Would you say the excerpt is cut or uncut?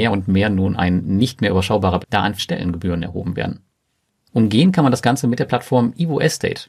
cut